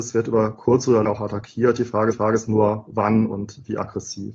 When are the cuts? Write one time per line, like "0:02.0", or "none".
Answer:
0:01.1
0:02.1